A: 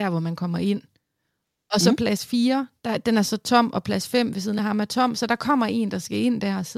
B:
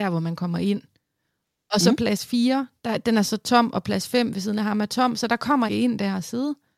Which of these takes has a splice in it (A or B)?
B